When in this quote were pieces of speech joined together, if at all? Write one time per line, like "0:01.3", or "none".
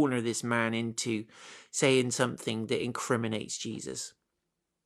none